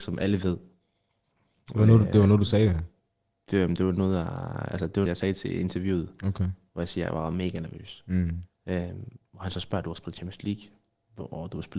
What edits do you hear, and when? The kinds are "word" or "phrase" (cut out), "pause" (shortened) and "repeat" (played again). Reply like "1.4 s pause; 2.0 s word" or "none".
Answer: 5.1 s word; 8.5 s pause